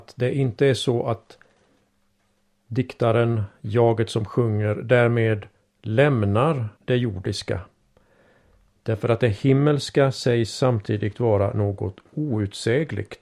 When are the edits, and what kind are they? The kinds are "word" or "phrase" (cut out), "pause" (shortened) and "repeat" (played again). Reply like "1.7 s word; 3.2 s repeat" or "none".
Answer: 6.8 s pause